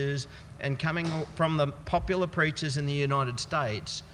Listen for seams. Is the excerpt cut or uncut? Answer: uncut